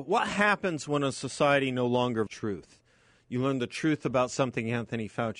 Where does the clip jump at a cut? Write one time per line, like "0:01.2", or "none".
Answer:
0:02.3